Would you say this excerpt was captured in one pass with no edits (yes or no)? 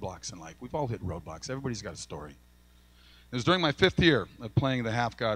yes